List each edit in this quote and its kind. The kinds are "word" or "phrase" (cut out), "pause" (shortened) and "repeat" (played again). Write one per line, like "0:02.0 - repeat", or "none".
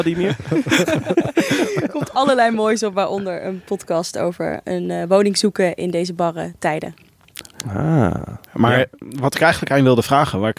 0:08.5 - pause